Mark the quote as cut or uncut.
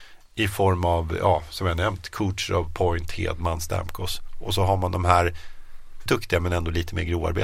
cut